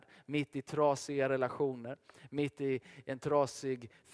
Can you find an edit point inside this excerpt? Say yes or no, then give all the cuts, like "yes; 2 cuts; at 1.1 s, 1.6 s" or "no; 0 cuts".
no; 0 cuts